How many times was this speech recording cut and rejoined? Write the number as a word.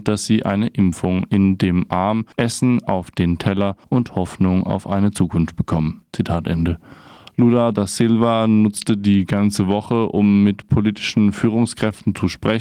two